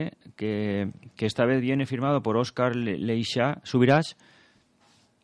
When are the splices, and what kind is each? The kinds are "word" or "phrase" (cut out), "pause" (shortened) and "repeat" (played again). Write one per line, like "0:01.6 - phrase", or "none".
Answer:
none